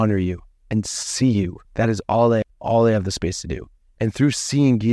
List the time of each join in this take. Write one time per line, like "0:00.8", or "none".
0:01.6
0:02.4